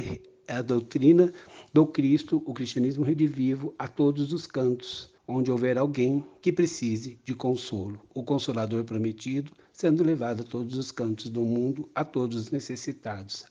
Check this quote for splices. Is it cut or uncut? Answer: cut